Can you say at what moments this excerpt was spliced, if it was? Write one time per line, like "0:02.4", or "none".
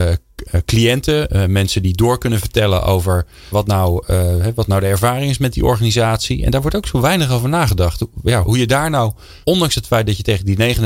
0:03.5
0:08.4
0:09.4